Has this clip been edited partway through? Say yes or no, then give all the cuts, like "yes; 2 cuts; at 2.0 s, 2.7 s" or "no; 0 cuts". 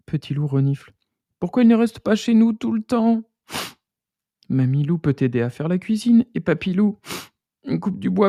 no; 0 cuts